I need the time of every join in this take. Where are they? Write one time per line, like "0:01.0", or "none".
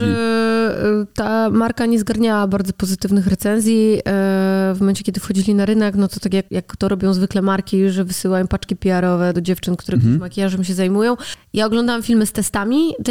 0:06.5
0:09.3